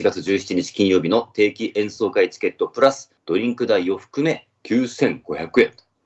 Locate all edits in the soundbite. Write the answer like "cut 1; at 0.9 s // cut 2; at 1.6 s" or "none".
cut 1; at 3.2 s